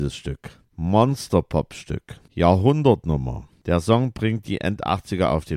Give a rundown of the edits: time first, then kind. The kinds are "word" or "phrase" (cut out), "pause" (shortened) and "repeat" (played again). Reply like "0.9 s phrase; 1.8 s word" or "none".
2.3 s pause